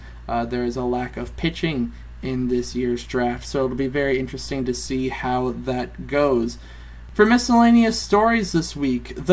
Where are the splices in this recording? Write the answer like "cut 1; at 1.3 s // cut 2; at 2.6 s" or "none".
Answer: none